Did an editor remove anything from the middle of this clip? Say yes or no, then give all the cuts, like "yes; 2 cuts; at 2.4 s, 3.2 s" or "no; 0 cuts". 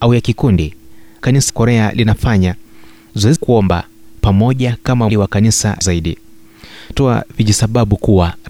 yes; 6 cuts; at 1.2 s, 1.5 s, 3.4 s, 5.1 s, 5.8 s, 6.9 s